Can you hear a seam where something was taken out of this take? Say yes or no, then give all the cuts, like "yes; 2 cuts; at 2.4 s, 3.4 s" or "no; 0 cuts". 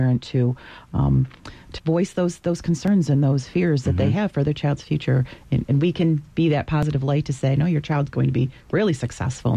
yes; 2 cuts; at 1.8 s, 5.6 s